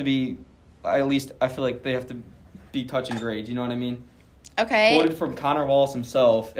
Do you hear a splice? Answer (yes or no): no